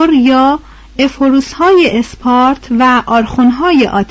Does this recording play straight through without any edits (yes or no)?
yes